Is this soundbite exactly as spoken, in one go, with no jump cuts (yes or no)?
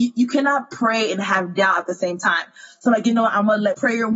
yes